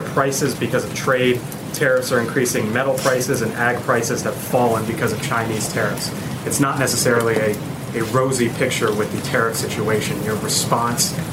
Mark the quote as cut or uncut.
uncut